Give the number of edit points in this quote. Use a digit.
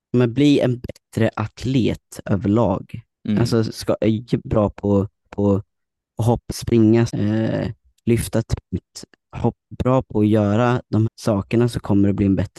8